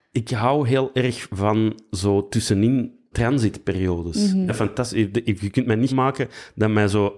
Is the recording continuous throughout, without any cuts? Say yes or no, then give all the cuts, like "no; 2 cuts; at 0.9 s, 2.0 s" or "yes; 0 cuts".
no; 3 cuts; at 3.1 s, 4.5 s, 5.9 s